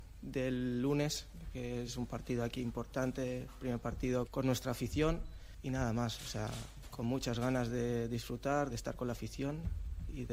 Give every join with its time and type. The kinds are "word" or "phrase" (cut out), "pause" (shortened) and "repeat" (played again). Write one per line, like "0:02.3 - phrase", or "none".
0:04.3 - word
0:08.7 - word